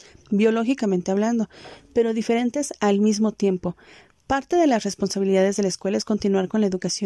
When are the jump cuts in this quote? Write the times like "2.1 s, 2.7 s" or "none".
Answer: none